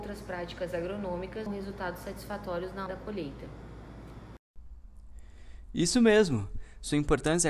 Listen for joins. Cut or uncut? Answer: cut